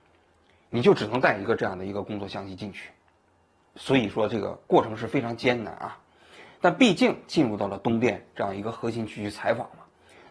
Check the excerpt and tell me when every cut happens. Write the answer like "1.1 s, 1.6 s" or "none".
3.8 s